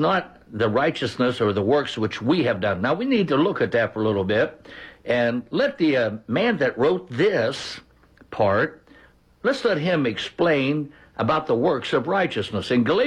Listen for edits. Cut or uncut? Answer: uncut